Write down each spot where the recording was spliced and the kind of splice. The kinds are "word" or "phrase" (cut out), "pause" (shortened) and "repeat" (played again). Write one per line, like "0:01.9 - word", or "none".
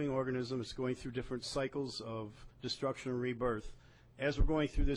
0:02.5 - pause